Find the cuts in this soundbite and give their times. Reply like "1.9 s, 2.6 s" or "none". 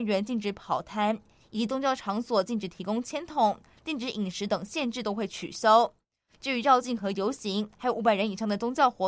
none